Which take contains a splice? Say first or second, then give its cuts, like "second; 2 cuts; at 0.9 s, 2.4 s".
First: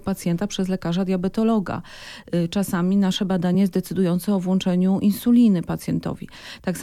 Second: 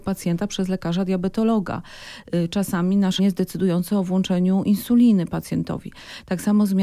second; 1 cut; at 3.2 s